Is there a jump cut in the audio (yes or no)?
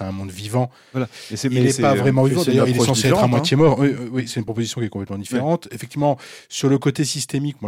no